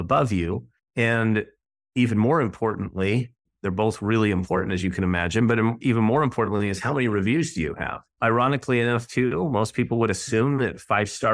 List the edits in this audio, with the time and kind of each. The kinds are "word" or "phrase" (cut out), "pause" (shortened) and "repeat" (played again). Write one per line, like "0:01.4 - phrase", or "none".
none